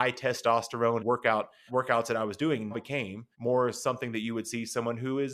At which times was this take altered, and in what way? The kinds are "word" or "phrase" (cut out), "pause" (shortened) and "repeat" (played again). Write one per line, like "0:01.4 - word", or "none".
0:01.0 - word
0:01.7 - word
0:02.7 - word
0:03.3 - pause